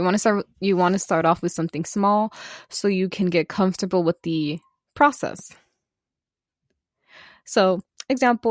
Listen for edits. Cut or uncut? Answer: uncut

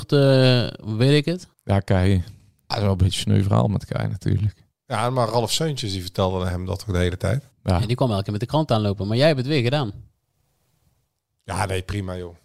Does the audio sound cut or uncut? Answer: cut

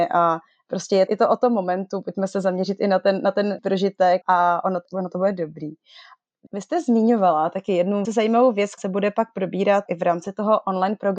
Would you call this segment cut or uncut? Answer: cut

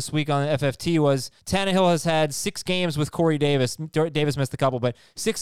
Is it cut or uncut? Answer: cut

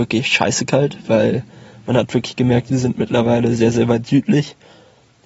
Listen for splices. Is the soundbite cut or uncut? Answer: uncut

